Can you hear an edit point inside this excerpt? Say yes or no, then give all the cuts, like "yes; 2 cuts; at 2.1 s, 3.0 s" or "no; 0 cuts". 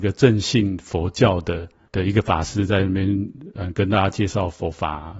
no; 0 cuts